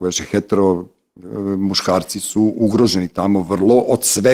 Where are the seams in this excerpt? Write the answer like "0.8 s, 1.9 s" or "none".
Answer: none